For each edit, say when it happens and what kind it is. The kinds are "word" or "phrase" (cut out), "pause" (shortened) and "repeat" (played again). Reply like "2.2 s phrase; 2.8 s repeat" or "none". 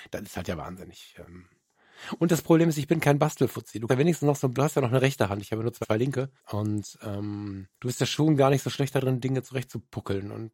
3.9 s word; 4.5 s phrase; 5.8 s word; 6.4 s pause; 7.8 s pause